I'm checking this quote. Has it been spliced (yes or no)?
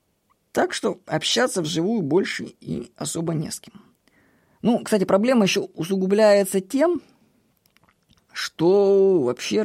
no